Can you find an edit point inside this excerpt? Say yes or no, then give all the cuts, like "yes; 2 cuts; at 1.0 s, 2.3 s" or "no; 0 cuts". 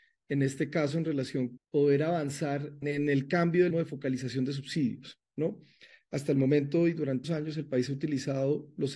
yes; 4 cuts; at 1.6 s, 2.8 s, 3.7 s, 7.2 s